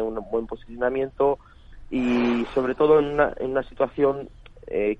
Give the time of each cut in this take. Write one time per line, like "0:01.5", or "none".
none